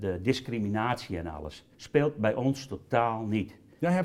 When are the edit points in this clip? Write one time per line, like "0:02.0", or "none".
0:01.7